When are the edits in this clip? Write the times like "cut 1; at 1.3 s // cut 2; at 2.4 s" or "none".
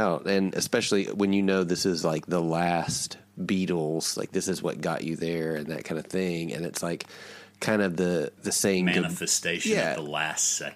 cut 1; at 8.4 s

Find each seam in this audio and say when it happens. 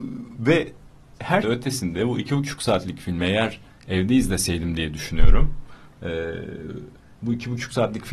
cut 1; at 1.4 s

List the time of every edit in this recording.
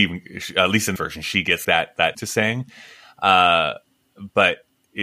cut 1; at 1.0 s // cut 2; at 1.6 s // cut 3; at 2.1 s

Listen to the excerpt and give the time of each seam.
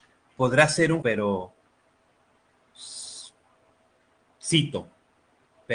cut 1; at 1.0 s

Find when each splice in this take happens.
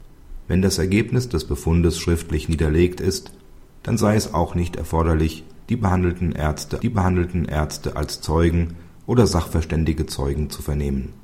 cut 1; at 6.8 s

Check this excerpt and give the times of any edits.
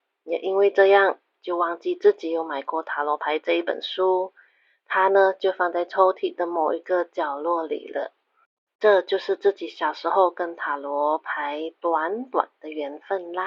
none

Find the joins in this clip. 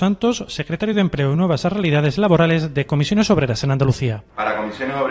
none

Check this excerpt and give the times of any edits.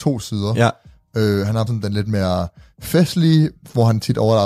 cut 1; at 1.7 s

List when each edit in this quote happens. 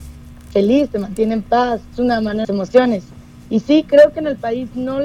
cut 1; at 1.9 s // cut 2; at 2.4 s

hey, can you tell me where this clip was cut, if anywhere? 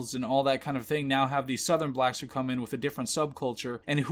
none

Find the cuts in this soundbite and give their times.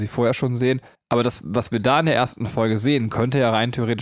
cut 1; at 0.9 s

